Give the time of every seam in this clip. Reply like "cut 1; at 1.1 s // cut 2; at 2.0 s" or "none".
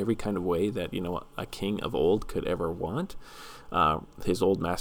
none